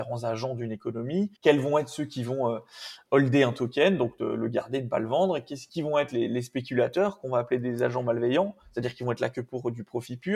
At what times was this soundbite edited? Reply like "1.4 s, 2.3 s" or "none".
1.4 s, 5.7 s